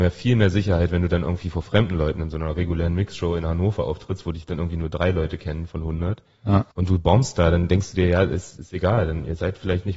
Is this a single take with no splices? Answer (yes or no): no